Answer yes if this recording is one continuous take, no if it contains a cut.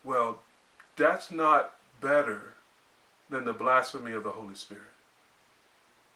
yes